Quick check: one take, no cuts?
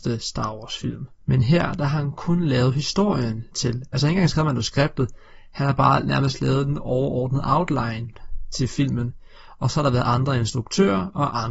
no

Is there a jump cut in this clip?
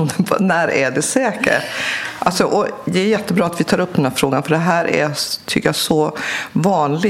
no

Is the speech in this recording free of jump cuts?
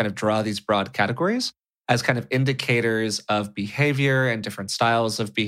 yes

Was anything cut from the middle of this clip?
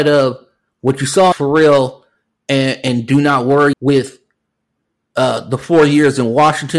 yes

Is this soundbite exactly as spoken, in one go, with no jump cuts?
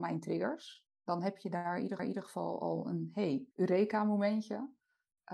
no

